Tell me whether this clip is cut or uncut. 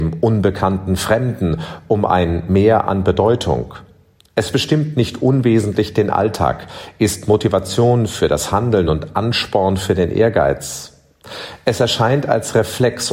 uncut